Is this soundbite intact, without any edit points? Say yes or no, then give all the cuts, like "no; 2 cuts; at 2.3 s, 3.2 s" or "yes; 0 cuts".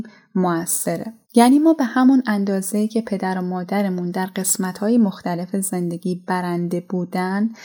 no; 1 cut; at 1.2 s